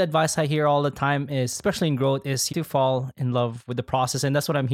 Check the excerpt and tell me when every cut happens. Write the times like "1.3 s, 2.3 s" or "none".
2.5 s